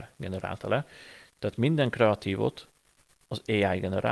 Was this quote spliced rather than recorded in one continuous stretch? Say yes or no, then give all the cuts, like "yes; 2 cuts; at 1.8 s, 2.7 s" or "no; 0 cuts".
no; 0 cuts